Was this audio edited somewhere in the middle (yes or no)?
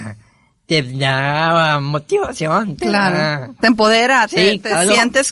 no